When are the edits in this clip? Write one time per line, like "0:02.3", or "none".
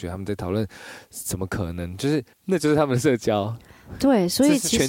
0:02.3

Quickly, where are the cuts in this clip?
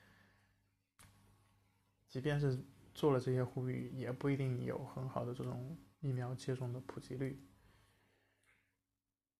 0:05.9

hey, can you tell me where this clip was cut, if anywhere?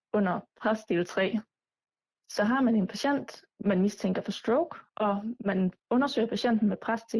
0:03.5
0:04.9
0:05.8

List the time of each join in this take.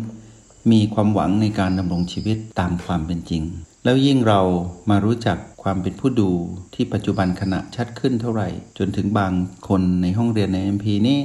0:03.7
0:05.5
0:06.7
0:08.7
0:09.6

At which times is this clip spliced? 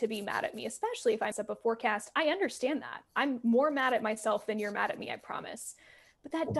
0:01.3

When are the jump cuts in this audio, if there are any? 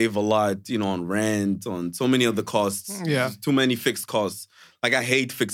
none

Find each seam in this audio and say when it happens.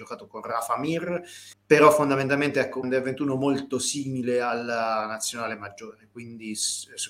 0:01.5
0:02.8

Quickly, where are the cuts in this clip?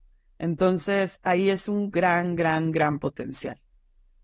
none

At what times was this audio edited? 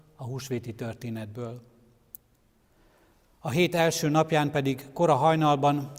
none

